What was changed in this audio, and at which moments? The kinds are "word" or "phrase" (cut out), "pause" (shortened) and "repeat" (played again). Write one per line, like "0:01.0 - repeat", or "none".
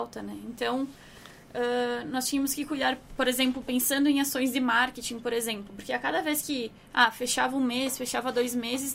none